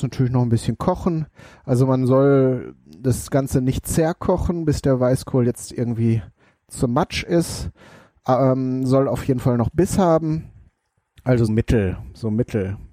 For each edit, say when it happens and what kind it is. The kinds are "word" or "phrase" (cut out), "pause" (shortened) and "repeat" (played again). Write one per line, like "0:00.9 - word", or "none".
0:11.5 - word